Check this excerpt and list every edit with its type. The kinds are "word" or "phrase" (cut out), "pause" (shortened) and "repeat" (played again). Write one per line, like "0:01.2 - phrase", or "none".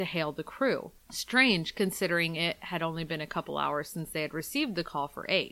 none